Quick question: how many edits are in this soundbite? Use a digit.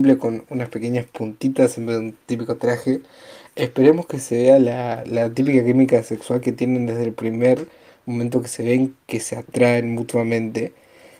0